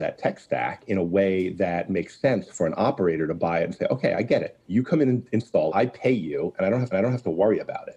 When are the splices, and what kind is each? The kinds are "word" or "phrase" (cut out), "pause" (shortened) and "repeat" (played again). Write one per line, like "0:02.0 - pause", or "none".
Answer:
0:04.6 - pause
0:05.7 - word
0:06.9 - repeat